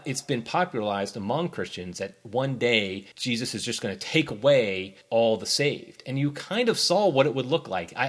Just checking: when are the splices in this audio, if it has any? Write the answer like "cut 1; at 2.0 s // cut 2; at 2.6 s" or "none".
cut 1; at 3.1 s // cut 2; at 5.0 s

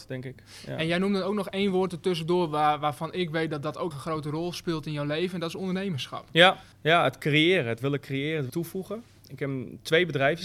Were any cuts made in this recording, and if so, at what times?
cut 1; at 3.9 s // cut 2; at 6.7 s // cut 3; at 8.5 s

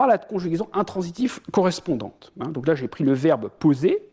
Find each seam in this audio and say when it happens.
none

